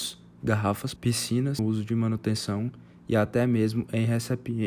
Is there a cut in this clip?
yes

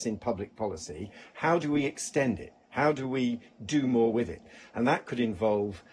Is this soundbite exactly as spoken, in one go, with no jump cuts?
yes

